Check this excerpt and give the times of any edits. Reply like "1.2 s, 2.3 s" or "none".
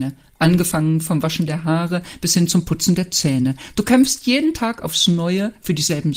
none